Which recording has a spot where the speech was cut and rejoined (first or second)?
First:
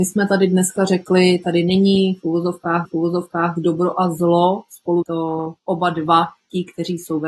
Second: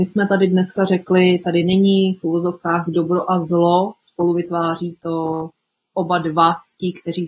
first